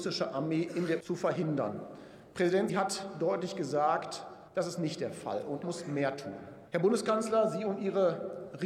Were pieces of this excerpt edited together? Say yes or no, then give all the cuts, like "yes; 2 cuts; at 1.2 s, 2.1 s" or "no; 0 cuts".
yes; 5 cuts; at 1.0 s, 2.7 s, 4.5 s, 5.6 s, 6.7 s